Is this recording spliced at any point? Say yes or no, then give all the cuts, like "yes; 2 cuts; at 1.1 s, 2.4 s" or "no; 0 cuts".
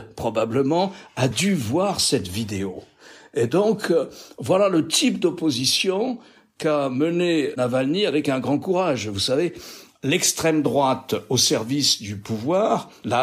no; 0 cuts